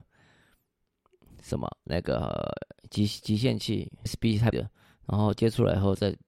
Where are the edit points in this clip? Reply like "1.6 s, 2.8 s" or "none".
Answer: 4.1 s, 4.5 s